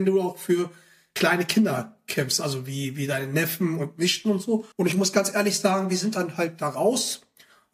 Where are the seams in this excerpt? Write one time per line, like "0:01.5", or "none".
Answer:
0:04.7